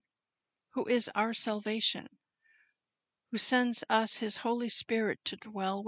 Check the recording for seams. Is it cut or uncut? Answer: uncut